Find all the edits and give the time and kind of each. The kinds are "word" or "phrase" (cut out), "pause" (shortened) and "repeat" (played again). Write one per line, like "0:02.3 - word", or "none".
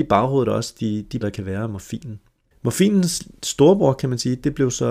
0:01.2 - word
0:02.5 - pause

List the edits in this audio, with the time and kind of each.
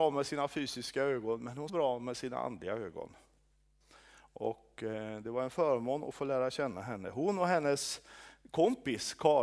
0:01.7 - word

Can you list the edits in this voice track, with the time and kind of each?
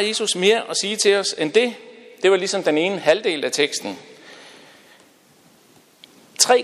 none

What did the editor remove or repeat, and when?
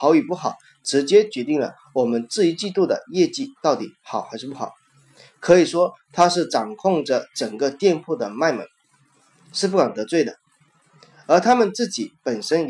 0:03.5 - pause

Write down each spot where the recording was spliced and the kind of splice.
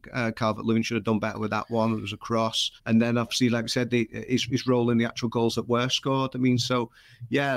0:02.8 - pause

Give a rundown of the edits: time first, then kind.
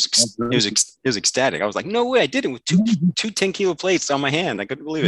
none

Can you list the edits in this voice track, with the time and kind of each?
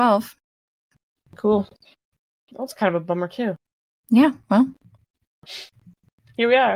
none

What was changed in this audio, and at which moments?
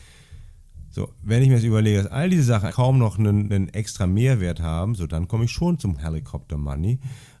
0:02.7 - word
0:03.5 - word
0:06.0 - phrase

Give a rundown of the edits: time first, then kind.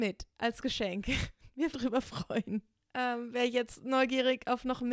0:01.7 - phrase
0:02.8 - pause

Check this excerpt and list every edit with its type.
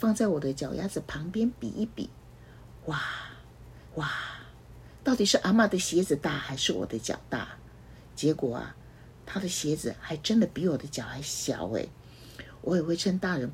0:03.9 - repeat

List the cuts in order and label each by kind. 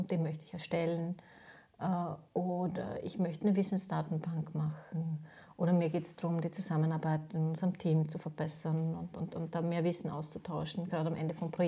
none

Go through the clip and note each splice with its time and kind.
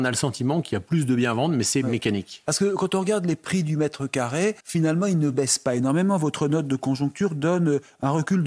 0:04.6 - pause

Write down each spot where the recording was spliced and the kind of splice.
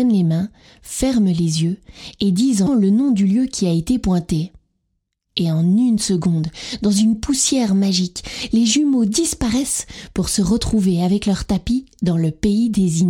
0:02.7 - phrase

